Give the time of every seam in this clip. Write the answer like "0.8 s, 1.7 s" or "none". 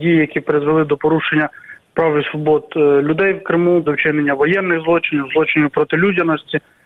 3.9 s